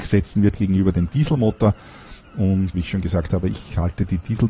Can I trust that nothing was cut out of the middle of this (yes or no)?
no